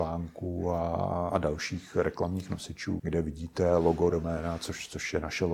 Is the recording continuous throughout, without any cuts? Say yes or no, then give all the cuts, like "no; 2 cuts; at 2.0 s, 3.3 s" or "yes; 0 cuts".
no; 3 cuts; at 1.3 s, 3.0 s, 4.1 s